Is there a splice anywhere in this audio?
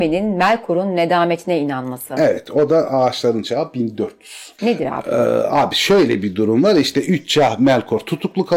no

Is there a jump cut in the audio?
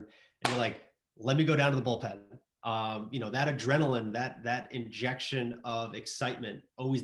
no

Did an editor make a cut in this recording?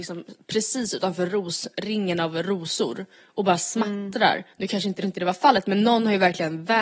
yes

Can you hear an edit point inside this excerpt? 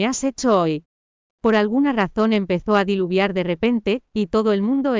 no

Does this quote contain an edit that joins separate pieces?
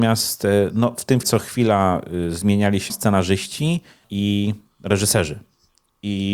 yes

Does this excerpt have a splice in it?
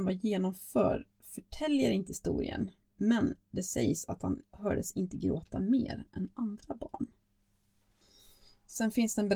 yes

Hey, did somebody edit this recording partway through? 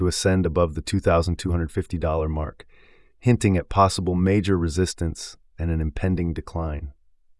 no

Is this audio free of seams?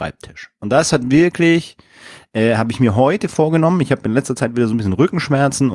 yes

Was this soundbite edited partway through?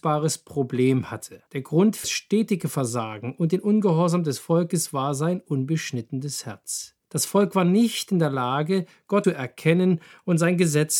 yes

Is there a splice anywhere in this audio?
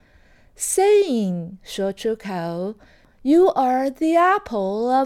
no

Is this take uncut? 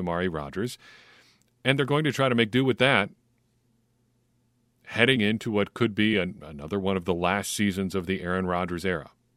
yes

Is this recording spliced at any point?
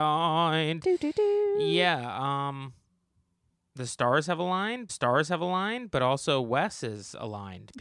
yes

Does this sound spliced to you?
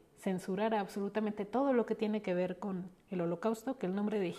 no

